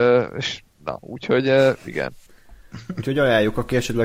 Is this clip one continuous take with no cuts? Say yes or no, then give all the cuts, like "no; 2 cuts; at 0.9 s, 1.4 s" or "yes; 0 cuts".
no; 1 cut; at 2.3 s